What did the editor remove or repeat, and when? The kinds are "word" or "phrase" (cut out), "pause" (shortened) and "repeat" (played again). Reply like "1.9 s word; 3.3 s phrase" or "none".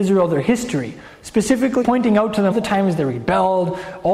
1.8 s word; 2.5 s word